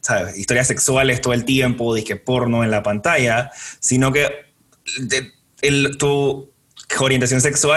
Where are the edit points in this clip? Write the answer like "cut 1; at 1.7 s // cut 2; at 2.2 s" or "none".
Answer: none